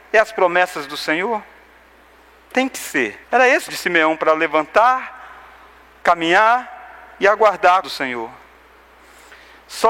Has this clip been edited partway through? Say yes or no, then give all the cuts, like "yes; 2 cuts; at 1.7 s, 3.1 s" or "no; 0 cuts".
yes; 3 cuts; at 3.2 s, 3.7 s, 7.8 s